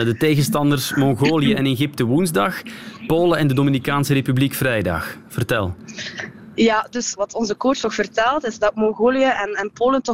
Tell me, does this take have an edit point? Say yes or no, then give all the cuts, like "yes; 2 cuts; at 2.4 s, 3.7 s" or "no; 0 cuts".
yes; 2 cuts; at 7.2 s, 7.8 s